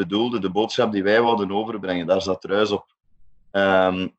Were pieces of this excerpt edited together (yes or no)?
no